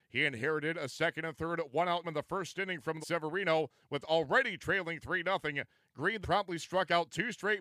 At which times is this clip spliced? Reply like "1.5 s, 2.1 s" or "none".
2.0 s, 3.0 s, 4.0 s, 6.2 s